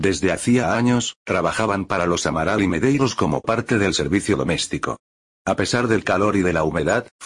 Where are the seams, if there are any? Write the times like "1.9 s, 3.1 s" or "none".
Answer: none